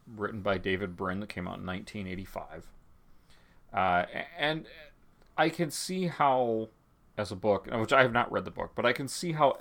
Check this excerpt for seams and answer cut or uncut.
uncut